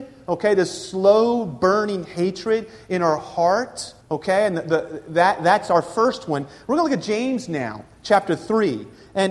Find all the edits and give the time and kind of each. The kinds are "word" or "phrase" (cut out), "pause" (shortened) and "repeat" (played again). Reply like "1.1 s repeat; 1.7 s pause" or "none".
4.0 s pause